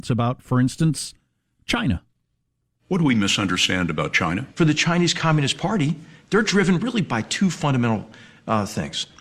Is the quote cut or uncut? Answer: cut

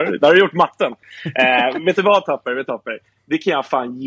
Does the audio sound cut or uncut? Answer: cut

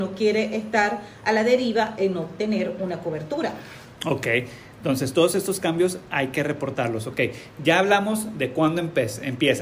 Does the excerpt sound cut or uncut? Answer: uncut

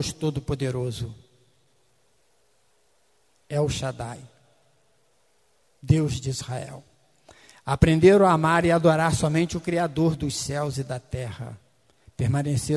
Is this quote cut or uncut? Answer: uncut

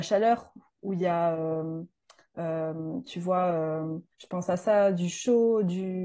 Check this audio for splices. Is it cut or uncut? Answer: cut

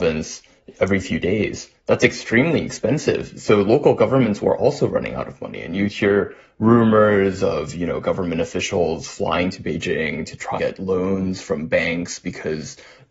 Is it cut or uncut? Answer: cut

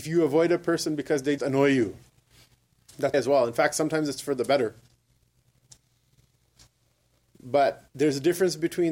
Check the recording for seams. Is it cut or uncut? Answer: cut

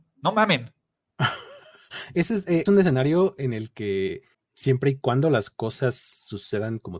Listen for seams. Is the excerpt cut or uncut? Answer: cut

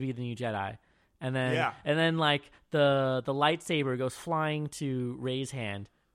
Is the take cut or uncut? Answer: uncut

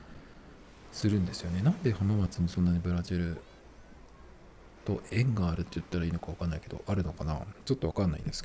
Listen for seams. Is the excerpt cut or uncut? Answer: cut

